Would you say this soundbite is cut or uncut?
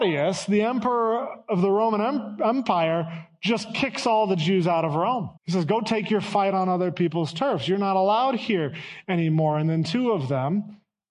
cut